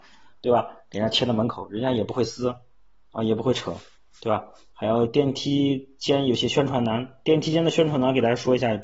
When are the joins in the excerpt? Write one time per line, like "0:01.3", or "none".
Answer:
none

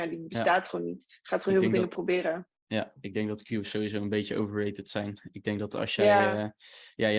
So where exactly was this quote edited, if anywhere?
0:02.6

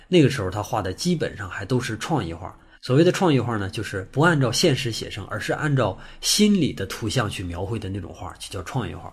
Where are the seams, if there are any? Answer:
0:02.7

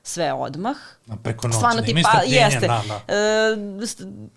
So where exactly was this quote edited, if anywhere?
none

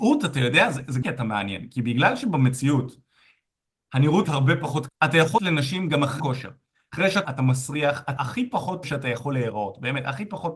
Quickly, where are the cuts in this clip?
0:01.0
0:04.2
0:04.9
0:05.4
0:06.2
0:07.2
0:08.2
0:08.8

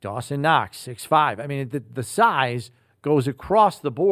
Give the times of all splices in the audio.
none

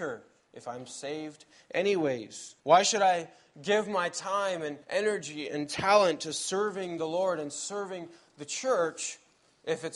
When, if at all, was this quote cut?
0:02.6
0:04.8

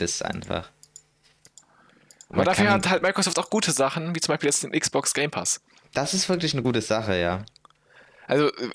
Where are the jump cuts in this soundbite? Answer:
none

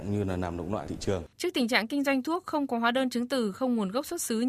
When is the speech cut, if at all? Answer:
0:01.3

